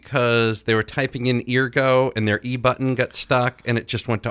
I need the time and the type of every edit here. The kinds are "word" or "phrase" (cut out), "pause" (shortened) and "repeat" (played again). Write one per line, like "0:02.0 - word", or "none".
none